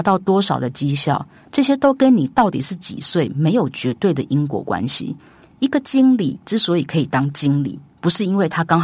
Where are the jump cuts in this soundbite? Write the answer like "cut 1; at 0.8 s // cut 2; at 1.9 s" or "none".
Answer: none